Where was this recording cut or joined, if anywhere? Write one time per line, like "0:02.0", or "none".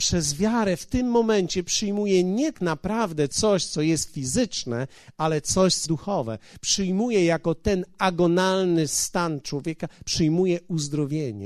0:02.5
0:05.9